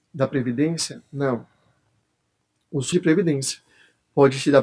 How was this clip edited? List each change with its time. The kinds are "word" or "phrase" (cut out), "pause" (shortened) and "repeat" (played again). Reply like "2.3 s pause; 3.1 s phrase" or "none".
2.9 s word